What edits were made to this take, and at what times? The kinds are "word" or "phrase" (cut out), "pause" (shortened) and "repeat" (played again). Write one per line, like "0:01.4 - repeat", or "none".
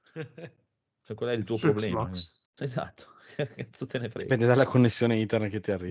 0:02.5 - pause